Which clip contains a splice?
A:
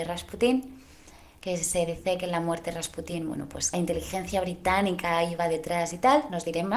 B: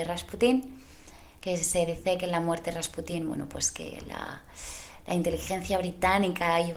A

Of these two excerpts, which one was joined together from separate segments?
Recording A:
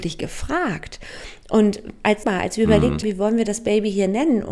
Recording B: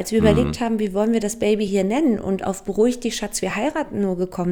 A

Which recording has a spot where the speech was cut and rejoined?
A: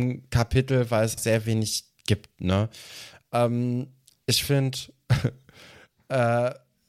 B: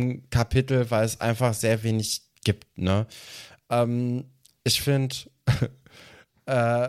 A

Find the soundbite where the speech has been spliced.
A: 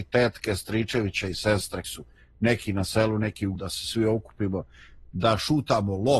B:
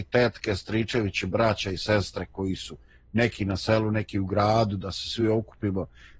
A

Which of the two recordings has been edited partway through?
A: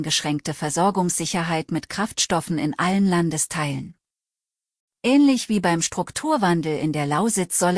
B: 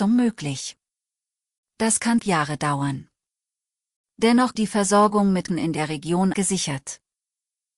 B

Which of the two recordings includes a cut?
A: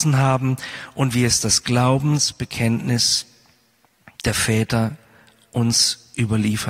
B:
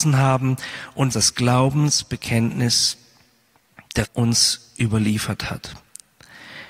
B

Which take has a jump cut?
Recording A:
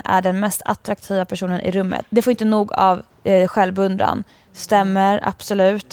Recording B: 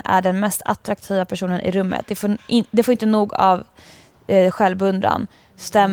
A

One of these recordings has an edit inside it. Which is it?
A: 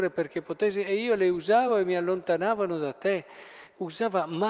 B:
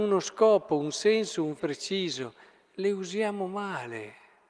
B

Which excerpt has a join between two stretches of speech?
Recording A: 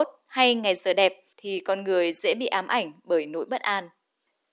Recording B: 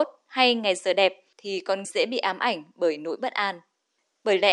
B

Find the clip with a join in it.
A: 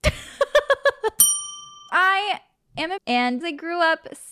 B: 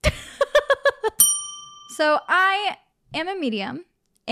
A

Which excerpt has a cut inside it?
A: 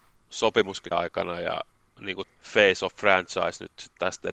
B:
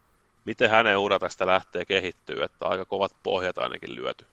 A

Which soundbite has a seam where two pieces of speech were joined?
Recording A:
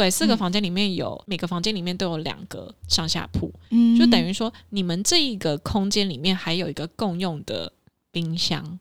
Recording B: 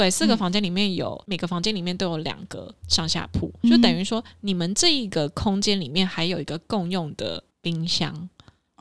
B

